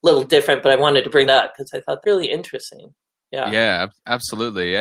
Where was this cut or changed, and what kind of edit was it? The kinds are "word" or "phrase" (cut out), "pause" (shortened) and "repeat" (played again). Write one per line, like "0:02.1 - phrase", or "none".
0:01.3 - word
0:02.0 - word